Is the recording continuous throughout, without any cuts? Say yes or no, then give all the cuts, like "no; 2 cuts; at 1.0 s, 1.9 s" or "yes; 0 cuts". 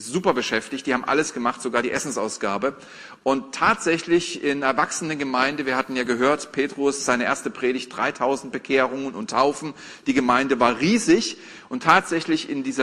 yes; 0 cuts